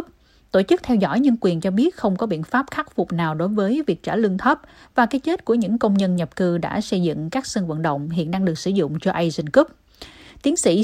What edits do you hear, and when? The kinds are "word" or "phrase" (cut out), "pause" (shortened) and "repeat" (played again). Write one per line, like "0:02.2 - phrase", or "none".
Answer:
none